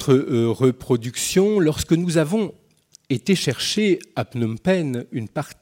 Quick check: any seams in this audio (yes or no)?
no